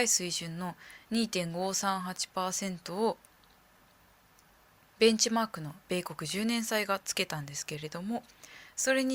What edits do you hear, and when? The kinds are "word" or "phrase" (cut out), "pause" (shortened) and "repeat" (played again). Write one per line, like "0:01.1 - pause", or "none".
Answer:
none